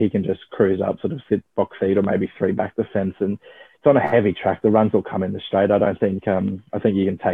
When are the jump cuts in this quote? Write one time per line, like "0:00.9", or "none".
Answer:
none